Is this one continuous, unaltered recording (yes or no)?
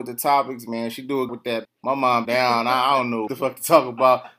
no